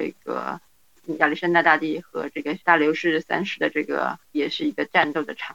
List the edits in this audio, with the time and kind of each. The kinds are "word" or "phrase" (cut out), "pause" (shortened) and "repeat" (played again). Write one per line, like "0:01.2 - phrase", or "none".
0:02.6 - pause